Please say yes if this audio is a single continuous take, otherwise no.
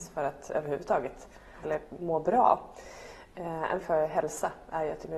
no